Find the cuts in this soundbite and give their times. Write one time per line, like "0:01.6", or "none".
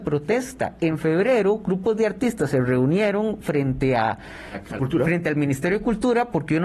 0:04.8